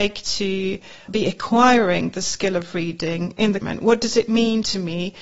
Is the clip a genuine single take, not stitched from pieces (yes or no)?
no